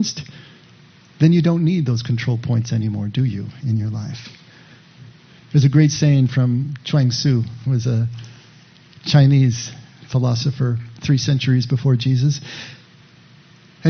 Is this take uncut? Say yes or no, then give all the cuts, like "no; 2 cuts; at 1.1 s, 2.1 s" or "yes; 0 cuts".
yes; 0 cuts